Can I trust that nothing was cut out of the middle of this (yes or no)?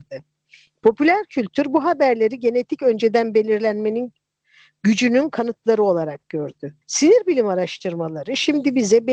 no